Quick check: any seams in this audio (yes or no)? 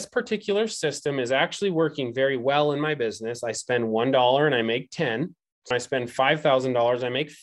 yes